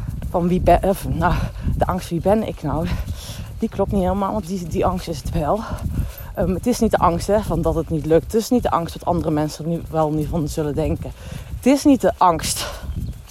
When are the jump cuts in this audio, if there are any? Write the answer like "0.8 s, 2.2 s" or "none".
4.4 s

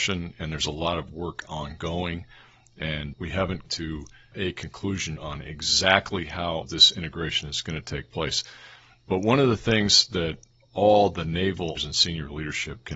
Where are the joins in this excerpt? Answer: 3.1 s, 3.7 s, 4.3 s, 5.2 s, 6.6 s, 11.8 s

